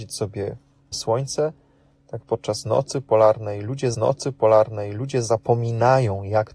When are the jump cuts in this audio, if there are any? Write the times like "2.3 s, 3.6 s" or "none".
0.9 s, 3.9 s

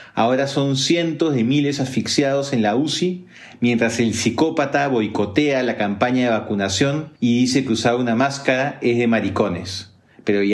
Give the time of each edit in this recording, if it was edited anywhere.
7.2 s

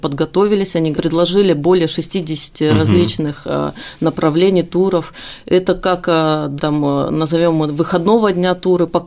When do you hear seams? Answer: 0.9 s, 6.6 s

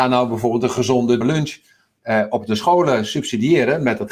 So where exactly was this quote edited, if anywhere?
1.2 s

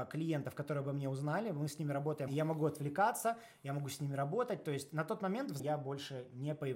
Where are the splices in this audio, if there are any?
2.3 s, 5.6 s

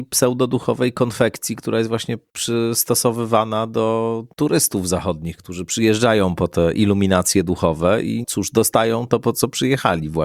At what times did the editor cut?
4.3 s, 8.2 s

